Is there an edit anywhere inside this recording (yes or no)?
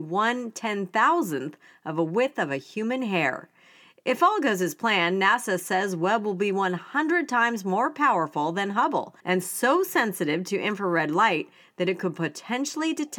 yes